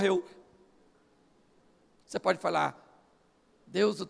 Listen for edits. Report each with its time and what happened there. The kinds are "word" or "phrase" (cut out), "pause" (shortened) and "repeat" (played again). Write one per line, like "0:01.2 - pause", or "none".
none

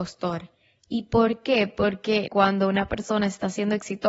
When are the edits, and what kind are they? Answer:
0:02.3 - word

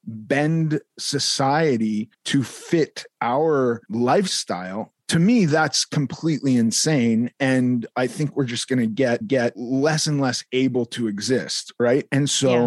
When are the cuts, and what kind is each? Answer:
0:02.1 - pause
0:09.2 - repeat

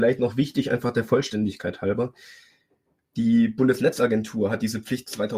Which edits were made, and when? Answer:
none

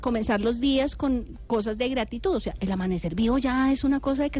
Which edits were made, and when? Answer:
none

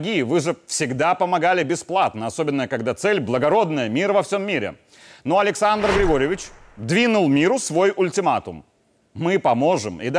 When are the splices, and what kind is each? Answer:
none

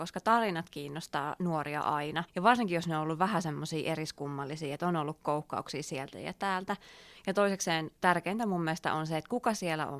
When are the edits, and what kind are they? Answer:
0:02.3 - pause

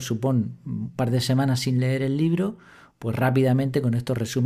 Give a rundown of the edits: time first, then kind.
none

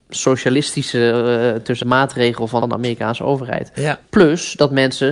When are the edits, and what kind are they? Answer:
0:01.8 - word
0:02.6 - phrase

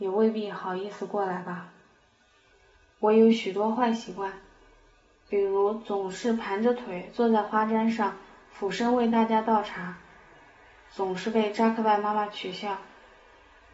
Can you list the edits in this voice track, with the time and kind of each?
none

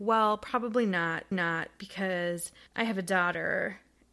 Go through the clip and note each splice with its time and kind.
0:01.3 - repeat

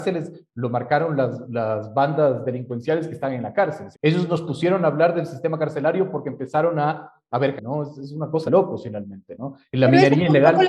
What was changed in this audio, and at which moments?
0:01.4 - word
0:03.9 - word
0:07.6 - word
0:08.5 - word

